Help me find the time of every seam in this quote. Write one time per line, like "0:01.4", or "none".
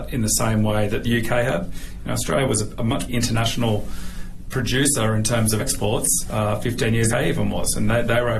0:03.1
0:05.6
0:07.1